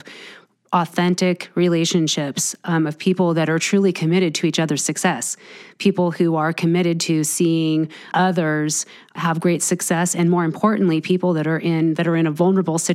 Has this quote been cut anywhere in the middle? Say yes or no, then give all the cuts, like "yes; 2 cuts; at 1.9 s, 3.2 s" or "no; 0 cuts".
yes; 2 cuts; at 8.1 s, 9.2 s